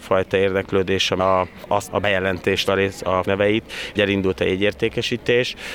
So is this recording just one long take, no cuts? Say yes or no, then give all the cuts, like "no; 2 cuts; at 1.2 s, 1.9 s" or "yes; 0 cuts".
no; 5 cuts; at 1.2 s, 1.9 s, 2.7 s, 3.2 s, 4.0 s